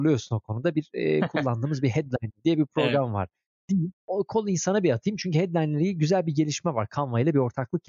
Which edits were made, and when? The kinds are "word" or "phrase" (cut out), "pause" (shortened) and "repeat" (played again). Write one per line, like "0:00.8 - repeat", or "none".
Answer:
0:03.9 - pause